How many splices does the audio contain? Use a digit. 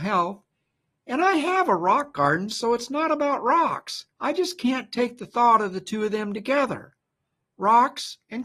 1